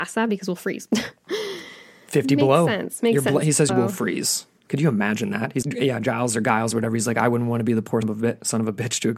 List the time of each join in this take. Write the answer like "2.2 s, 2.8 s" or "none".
3.7 s, 5.6 s, 8.0 s